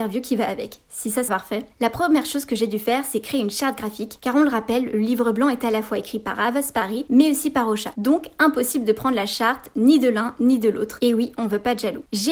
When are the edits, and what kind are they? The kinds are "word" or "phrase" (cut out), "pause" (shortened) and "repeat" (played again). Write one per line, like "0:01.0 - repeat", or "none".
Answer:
0:01.3 - word